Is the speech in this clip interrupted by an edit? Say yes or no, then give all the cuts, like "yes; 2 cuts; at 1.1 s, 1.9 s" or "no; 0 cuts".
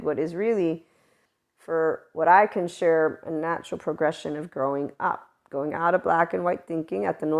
no; 0 cuts